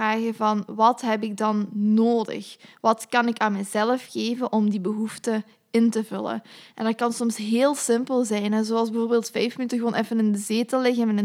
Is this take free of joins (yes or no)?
yes